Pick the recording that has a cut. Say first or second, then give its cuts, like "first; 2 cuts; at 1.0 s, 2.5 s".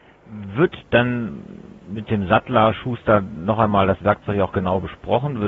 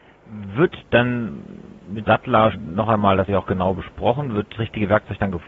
second; 4 cuts; at 2.1 s, 2.5 s, 3.3 s, 4.6 s